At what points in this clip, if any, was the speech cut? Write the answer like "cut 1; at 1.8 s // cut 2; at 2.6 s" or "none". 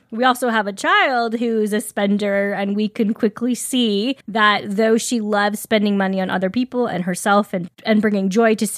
cut 1; at 4.2 s